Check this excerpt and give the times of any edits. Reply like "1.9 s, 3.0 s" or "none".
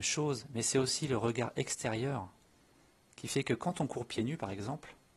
none